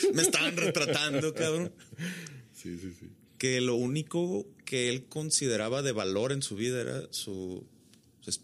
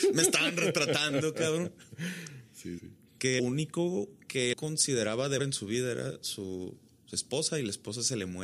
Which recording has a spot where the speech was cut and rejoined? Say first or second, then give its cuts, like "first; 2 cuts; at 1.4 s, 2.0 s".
second; 5 cuts; at 2.8 s, 3.4 s, 4.5 s, 5.4 s, 6.9 s